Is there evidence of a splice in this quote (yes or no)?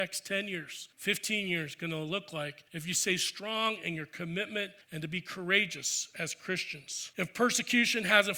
yes